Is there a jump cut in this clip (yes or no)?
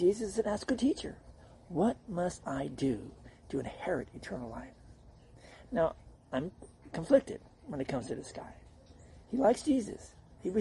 no